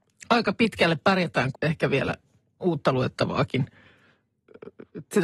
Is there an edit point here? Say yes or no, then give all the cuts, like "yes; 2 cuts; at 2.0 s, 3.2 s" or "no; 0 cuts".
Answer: yes; 2 cuts; at 1.5 s, 2.6 s